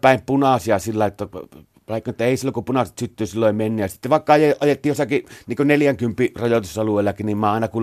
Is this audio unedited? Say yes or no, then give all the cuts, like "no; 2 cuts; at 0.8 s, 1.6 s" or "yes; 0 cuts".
yes; 0 cuts